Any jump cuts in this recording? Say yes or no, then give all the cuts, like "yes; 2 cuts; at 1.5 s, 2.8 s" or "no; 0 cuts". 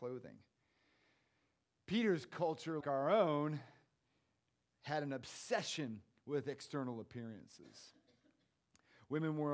yes; 1 cut; at 2.8 s